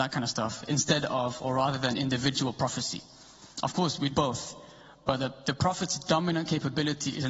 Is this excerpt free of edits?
no; 1 cut; at 4.1 s

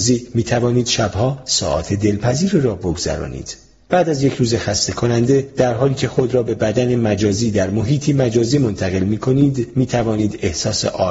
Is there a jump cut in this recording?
no; 0 cuts

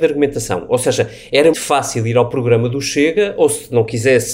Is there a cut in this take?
yes; 1 cut; at 1.5 s

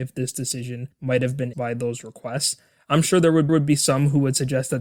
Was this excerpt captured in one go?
no; 3 cuts; at 0.9 s, 1.5 s, 3.5 s

